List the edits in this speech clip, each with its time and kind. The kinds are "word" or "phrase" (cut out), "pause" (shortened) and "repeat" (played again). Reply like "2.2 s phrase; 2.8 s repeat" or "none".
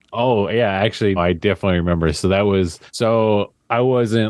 1.2 s word; 2.9 s pause